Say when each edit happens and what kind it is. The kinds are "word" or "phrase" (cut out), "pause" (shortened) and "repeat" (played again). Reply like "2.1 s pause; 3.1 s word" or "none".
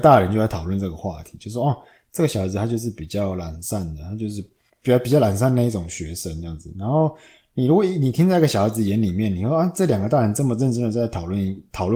none